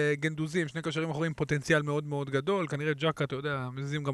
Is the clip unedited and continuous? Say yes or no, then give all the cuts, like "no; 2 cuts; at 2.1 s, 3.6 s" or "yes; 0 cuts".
yes; 0 cuts